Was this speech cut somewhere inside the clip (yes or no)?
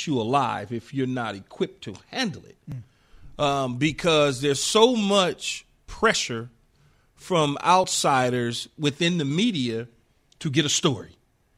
no